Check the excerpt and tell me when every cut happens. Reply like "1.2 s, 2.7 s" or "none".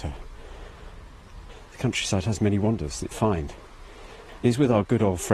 3.1 s